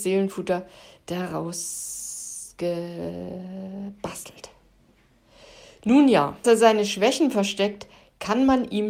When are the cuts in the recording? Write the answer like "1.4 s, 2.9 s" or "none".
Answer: 6.4 s